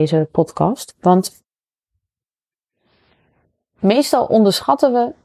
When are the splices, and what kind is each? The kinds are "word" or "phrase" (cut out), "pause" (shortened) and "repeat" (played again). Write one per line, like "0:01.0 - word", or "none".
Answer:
none